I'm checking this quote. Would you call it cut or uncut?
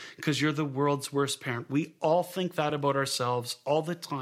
uncut